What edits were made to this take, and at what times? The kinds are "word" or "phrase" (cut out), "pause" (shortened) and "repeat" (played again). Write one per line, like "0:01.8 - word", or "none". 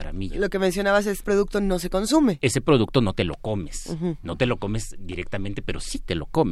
0:01.2 - word